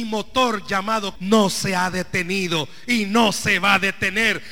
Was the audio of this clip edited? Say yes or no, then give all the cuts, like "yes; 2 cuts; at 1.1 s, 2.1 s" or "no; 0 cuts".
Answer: yes; 1 cut; at 1.2 s